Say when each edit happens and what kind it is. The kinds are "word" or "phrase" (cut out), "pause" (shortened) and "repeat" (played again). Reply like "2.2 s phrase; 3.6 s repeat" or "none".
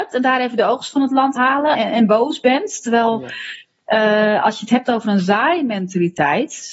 1.4 s word; 1.7 s word